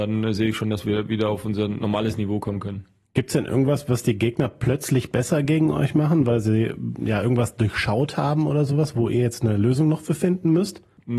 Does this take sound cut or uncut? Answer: uncut